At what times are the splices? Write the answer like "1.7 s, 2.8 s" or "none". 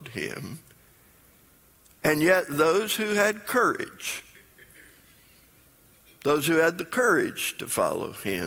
none